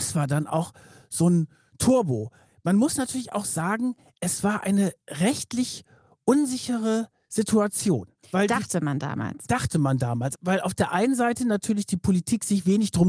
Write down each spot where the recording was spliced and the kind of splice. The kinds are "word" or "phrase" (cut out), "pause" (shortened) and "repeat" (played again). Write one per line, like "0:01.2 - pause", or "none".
none